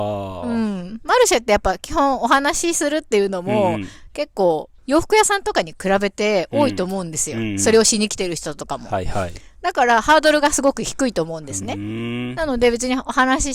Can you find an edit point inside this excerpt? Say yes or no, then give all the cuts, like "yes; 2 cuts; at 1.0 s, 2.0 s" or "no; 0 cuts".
yes; 1 cut; at 4.8 s